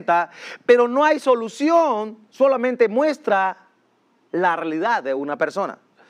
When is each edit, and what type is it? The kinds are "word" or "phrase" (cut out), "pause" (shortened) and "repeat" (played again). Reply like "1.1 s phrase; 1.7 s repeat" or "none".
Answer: none